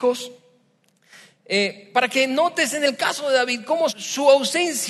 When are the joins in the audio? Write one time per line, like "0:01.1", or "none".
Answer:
0:03.9